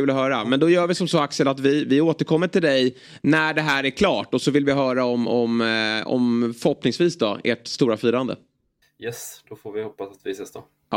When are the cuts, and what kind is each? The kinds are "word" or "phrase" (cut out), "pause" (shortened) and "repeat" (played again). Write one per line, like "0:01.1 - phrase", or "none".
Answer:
0:08.8 - pause

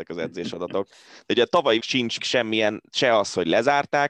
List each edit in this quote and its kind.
0:01.8 - word
0:02.2 - word

